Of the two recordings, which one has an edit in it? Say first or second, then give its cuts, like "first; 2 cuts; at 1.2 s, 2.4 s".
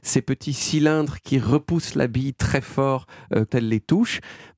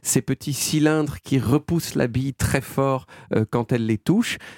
first; 1 cut; at 3.5 s